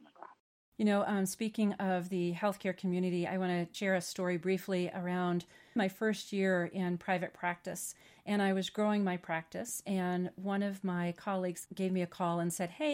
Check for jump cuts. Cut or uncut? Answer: cut